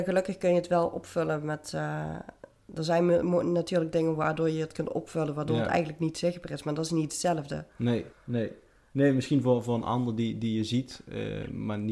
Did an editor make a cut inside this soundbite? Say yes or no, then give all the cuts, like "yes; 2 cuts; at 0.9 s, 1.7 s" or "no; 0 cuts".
yes; 1 cut; at 8.1 s